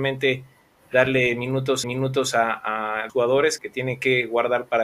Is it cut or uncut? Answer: cut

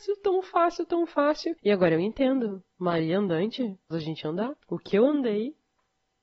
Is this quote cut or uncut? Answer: cut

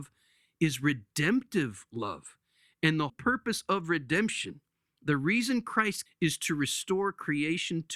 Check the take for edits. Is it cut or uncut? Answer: cut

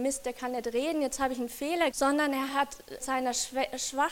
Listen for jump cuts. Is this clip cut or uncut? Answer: cut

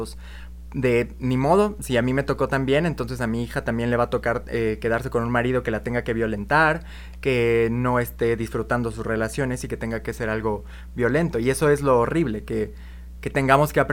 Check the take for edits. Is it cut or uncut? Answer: uncut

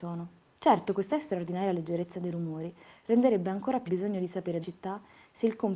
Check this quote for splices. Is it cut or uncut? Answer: cut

